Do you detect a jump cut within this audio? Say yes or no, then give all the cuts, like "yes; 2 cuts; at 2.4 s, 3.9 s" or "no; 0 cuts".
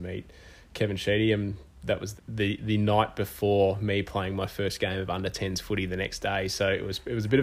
yes; 1 cut; at 2.2 s